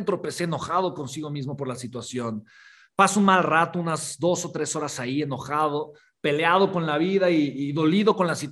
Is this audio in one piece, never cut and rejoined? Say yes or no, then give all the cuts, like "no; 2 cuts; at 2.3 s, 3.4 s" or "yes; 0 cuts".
yes; 0 cuts